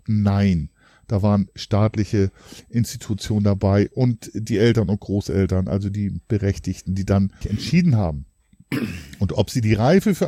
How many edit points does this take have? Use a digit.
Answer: 1